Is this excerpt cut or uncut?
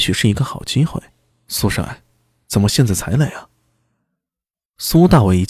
uncut